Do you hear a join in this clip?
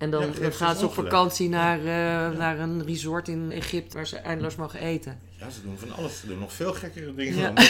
yes; 2 cuts; at 3.5 s, 3.9 s

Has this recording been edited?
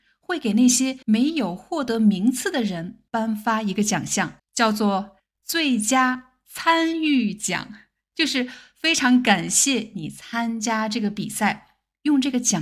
yes; 4 cuts; at 1.0 s, 3.1 s, 4.4 s, 5.2 s

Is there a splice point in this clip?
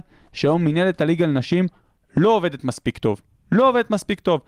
no; 0 cuts

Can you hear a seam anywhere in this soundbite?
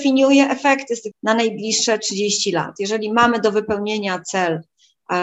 yes; 1 cut; at 1.1 s

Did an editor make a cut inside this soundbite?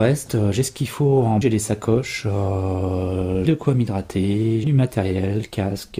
yes; 3 cuts; at 1.4 s, 3.5 s, 4.6 s

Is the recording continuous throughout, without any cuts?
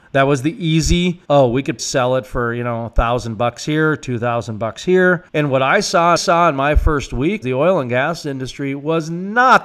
no; 5 cuts; at 1.2 s, 1.8 s, 5.3 s, 6.2 s, 7.4 s

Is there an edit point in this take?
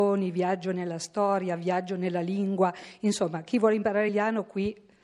yes; 1 cut; at 4.1 s

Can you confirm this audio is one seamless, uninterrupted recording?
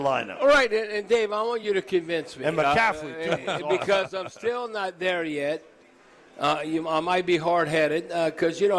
yes; 0 cuts

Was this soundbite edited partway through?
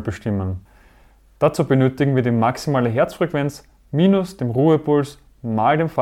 no; 0 cuts

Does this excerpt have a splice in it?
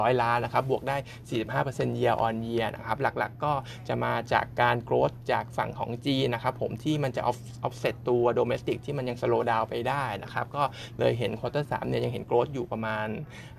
no; 0 cuts

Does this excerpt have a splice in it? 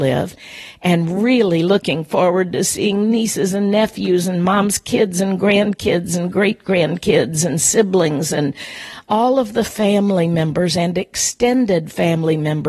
no; 0 cuts

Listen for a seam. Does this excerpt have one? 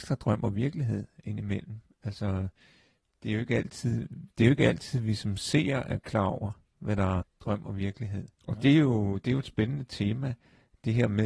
yes; 2 cuts; at 7.2 s, 8.3 s

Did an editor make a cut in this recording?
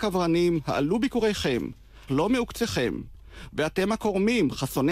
yes; 1 cut; at 2.1 s

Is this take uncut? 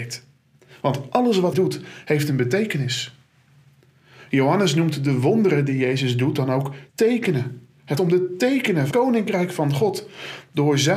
no; 4 cuts; at 1.5 s, 6.9 s, 8.0 s, 8.9 s

